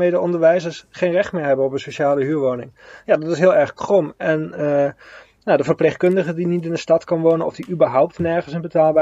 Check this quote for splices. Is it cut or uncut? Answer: uncut